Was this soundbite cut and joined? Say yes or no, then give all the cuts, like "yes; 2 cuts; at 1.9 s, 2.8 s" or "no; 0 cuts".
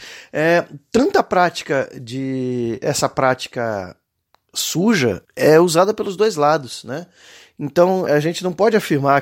yes; 2 cuts; at 5.3 s, 8.1 s